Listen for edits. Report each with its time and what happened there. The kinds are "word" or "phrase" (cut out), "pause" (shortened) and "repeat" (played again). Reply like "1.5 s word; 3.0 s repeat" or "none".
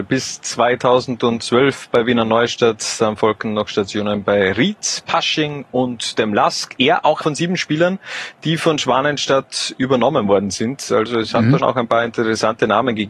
7.2 s word; 11.6 s word